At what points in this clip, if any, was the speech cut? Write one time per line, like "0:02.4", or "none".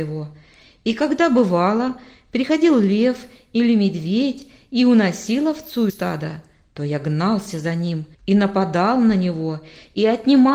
0:05.9
0:08.1